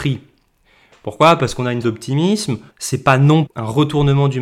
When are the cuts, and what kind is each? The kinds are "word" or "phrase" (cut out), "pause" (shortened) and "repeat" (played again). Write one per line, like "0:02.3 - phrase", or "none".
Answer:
0:01.8 - word
0:02.7 - pause
0:03.5 - word